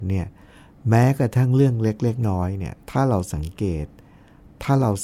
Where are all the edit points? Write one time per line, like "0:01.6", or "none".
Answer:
0:02.2
0:02.8